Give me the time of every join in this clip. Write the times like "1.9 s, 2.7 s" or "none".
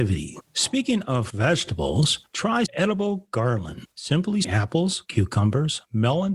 1.3 s, 2.7 s, 4.4 s